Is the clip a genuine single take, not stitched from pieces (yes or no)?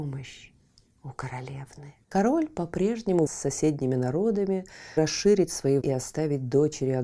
no